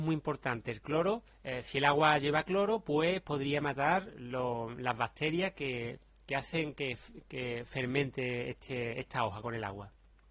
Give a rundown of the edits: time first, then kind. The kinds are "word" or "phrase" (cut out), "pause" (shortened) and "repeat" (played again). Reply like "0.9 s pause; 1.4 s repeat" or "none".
1.3 s pause